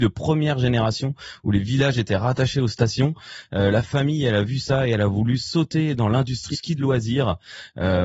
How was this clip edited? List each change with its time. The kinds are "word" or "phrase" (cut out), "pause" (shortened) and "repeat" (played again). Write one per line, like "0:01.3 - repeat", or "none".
0:06.5 - word